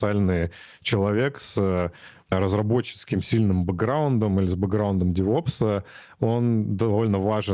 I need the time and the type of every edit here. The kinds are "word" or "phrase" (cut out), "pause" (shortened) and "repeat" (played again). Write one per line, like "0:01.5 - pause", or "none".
none